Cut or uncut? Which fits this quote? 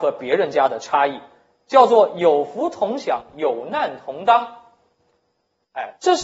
uncut